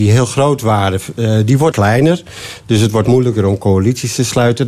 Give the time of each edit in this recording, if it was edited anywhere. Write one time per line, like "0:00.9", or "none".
0:01.7
0:03.0